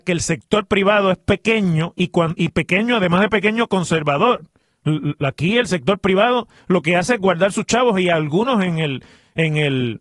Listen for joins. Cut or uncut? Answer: uncut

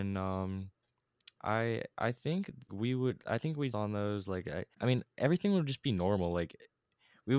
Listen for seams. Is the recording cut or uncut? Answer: cut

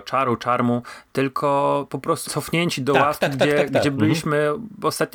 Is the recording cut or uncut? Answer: cut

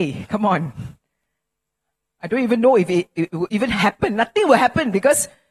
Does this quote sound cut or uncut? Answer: uncut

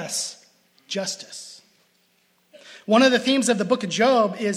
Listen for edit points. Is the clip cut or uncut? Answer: uncut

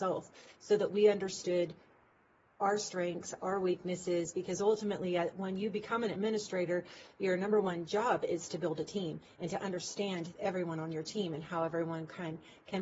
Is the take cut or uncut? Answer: uncut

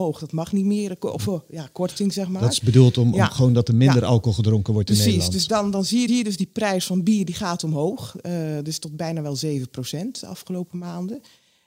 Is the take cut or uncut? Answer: cut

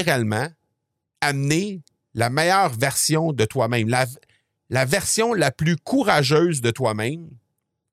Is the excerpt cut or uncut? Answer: uncut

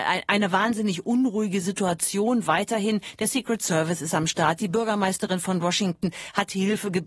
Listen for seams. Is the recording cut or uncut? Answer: uncut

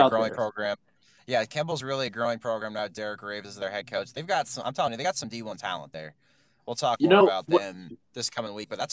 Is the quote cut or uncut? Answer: uncut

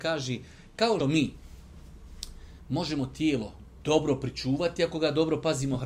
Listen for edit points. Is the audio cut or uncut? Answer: cut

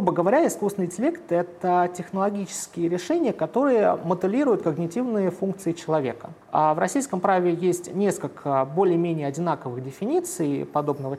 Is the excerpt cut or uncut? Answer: cut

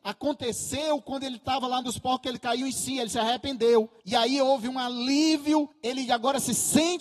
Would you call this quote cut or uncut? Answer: cut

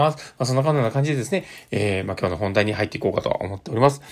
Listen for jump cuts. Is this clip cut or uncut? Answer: uncut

